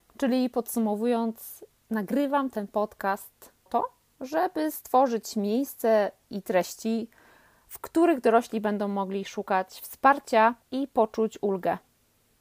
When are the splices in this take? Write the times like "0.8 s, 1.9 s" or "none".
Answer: 3.7 s, 10.6 s